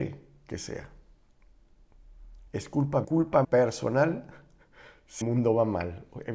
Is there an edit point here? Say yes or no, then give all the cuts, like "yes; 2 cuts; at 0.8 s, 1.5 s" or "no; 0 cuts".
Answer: yes; 4 cuts; at 2.5 s, 3.0 s, 3.4 s, 5.2 s